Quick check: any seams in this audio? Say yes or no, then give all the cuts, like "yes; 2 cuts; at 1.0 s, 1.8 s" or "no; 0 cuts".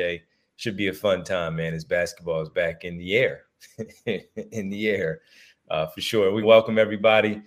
yes; 1 cut; at 6.4 s